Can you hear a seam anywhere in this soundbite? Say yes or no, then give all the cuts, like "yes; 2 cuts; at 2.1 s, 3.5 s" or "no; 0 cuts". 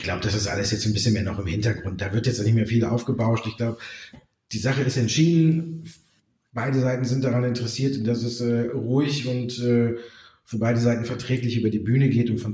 no; 0 cuts